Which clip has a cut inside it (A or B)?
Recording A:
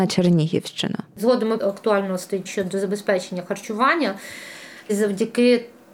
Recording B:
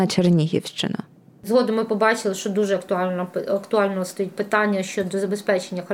A